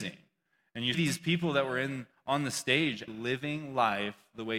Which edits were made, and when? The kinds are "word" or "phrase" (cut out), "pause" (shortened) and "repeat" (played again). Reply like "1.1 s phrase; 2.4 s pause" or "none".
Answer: 0.9 s word; 3.1 s word